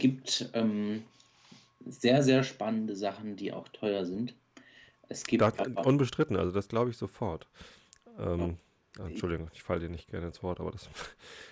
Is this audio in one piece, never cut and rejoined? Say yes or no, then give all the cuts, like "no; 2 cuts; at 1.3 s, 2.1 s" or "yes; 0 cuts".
yes; 0 cuts